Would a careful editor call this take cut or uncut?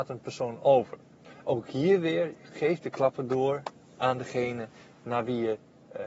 uncut